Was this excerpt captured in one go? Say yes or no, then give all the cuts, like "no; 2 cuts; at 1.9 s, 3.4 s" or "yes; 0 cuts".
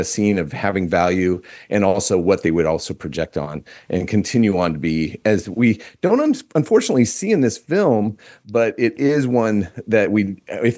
yes; 0 cuts